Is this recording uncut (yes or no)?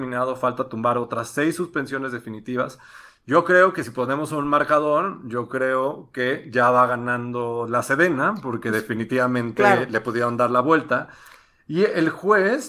yes